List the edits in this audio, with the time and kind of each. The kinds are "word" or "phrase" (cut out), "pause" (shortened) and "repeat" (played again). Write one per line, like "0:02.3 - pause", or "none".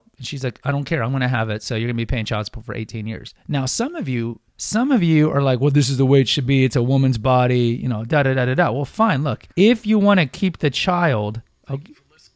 0:04.5 - pause
0:09.5 - pause